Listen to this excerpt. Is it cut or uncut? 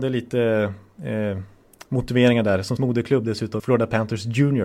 cut